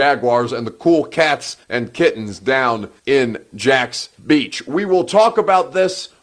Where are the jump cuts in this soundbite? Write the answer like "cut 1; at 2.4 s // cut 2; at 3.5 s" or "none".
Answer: cut 1; at 1.6 s // cut 2; at 3.0 s // cut 3; at 4.2 s